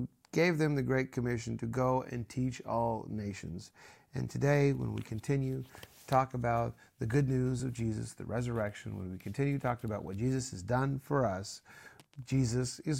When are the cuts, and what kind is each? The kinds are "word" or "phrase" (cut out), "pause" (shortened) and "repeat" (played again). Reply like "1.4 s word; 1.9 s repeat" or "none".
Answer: none